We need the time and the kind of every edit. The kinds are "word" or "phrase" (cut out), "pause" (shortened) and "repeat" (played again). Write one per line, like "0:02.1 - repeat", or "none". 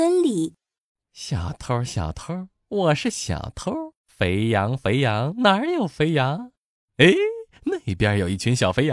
0:04.0 - pause